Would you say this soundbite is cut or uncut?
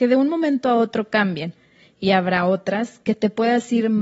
uncut